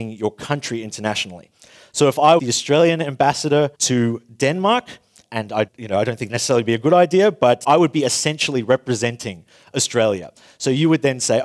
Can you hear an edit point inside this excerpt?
yes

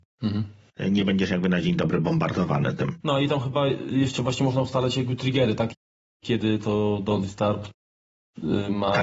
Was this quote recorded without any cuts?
yes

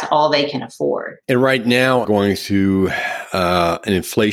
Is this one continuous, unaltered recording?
no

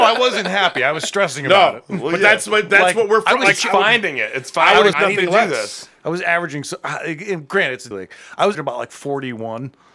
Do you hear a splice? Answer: yes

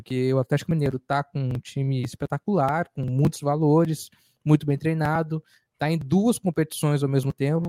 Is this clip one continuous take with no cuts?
yes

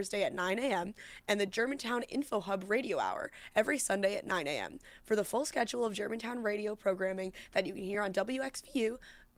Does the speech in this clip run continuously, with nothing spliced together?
yes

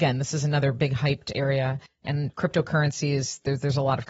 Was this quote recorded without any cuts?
no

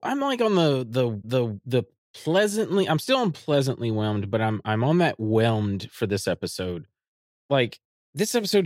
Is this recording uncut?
no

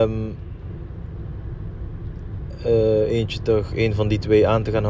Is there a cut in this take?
no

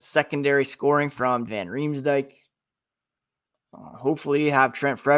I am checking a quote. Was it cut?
yes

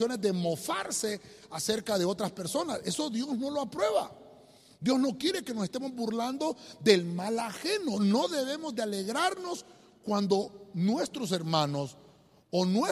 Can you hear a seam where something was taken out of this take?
no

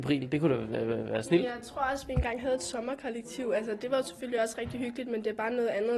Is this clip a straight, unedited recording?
yes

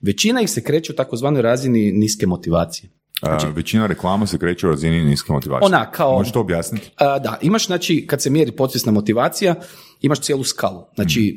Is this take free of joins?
yes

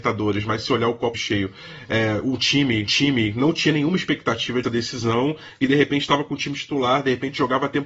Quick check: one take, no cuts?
no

